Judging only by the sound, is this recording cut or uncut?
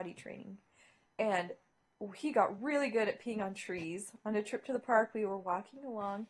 uncut